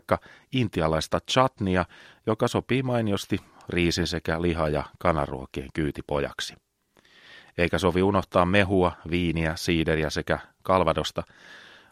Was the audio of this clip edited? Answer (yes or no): no